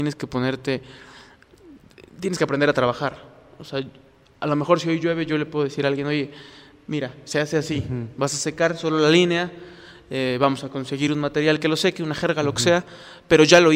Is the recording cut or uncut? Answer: uncut